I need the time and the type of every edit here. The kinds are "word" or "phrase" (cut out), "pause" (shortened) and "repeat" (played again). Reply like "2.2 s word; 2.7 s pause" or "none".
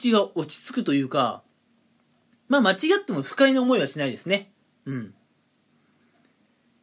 none